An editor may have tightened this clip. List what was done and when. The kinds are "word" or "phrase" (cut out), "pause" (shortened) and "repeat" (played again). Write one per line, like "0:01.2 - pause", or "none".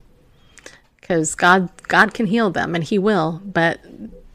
none